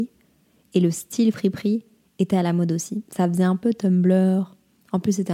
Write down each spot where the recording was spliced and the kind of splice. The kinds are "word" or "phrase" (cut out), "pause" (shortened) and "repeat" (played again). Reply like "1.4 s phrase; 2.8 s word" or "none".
none